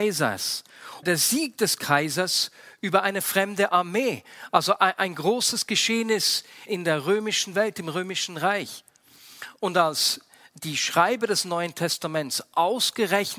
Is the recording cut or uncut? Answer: cut